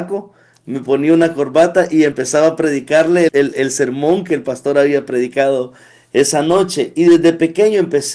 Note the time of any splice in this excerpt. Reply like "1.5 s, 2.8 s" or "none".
3.3 s